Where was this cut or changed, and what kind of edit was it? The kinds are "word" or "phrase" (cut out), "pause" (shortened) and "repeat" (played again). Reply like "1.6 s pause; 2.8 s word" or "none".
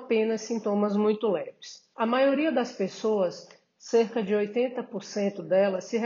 1.9 s pause